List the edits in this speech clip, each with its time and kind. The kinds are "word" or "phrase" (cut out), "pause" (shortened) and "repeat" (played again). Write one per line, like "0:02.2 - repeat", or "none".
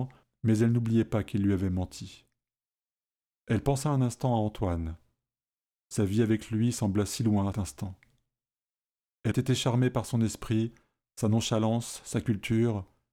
0:07.5 - word
0:09.3 - word